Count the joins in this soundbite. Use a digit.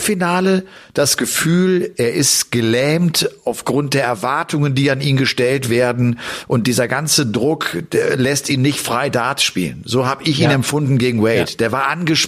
0